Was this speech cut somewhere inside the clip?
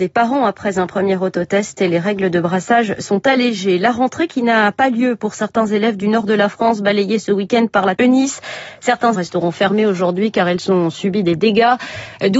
yes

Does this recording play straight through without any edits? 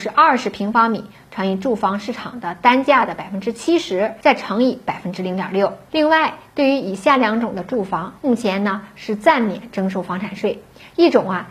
no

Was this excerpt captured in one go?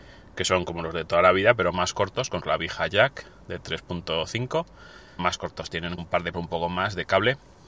no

